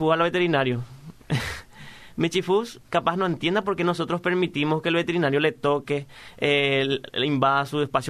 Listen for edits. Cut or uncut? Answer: cut